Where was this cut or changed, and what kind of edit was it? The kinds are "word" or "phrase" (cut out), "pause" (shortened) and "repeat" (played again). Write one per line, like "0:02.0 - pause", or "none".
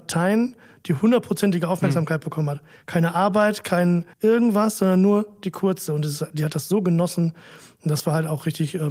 0:04.1 - pause

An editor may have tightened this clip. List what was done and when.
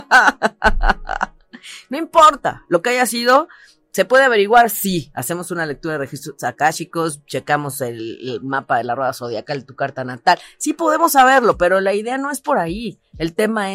none

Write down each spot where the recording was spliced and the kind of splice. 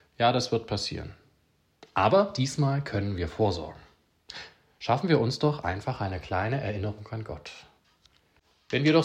none

